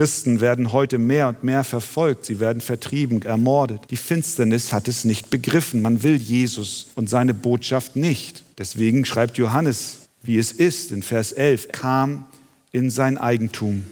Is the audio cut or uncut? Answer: cut